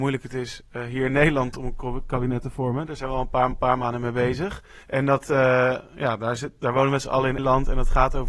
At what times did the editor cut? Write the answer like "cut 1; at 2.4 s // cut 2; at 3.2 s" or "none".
cut 1; at 3.5 s // cut 2; at 4.8 s // cut 3; at 7.4 s